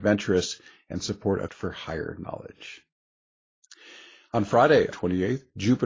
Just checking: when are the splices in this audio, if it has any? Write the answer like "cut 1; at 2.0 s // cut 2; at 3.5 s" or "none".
cut 1; at 1.5 s // cut 2; at 4.9 s